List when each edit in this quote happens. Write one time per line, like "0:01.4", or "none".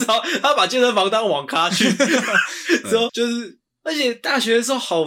0:03.1